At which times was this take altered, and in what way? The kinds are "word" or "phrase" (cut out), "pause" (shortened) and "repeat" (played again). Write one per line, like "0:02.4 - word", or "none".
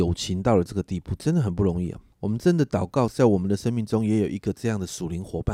0:02.1 - pause

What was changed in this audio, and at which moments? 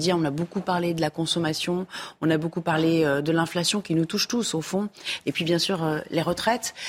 none

